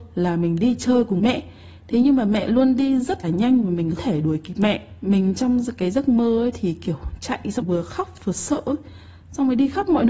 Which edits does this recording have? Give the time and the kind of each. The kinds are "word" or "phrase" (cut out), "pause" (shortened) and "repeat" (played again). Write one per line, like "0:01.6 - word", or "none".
0:01.2 - word
0:03.2 - word
0:04.0 - word
0:07.6 - word